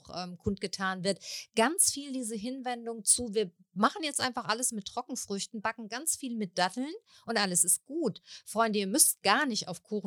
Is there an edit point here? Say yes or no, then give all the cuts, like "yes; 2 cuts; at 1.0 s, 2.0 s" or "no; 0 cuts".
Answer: no; 0 cuts